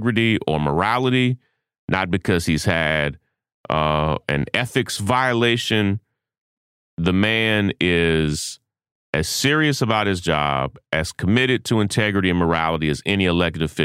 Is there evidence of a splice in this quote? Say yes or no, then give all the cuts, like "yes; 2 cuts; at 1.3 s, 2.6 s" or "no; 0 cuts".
no; 0 cuts